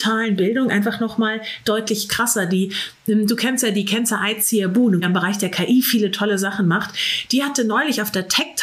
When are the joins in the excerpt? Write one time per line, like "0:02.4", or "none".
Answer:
0:05.0